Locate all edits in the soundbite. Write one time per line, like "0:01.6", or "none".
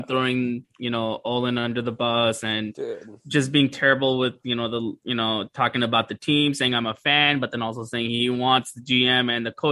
none